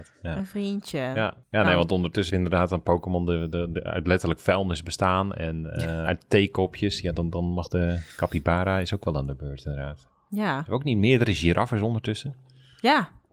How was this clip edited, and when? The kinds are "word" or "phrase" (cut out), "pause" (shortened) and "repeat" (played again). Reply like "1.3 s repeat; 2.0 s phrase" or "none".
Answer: 1.4 s pause; 2.3 s word; 6.1 s phrase